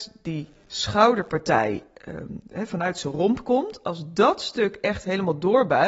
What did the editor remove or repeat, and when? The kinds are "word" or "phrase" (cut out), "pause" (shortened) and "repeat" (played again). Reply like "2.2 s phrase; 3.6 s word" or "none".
none